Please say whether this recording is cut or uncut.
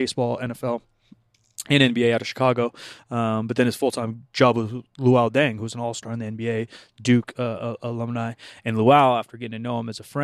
uncut